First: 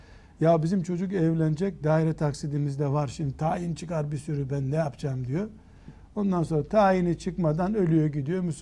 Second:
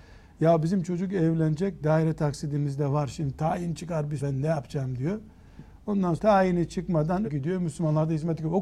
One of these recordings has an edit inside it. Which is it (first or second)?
second